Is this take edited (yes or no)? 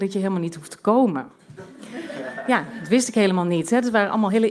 no